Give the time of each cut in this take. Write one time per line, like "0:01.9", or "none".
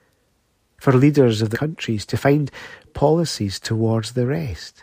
0:01.5
0:02.9

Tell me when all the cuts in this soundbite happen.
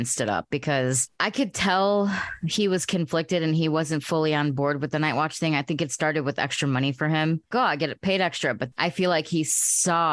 0:08.7

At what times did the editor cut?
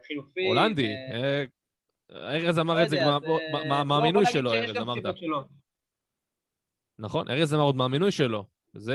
none

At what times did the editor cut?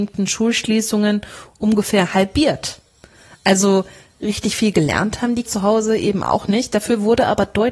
0:05.4

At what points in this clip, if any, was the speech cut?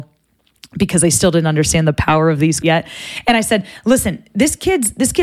0:02.6

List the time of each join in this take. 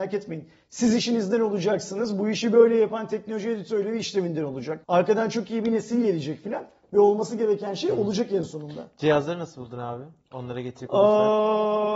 0:04.8

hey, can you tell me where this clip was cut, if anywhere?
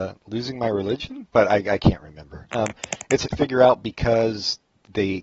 0:01.3
0:03.3

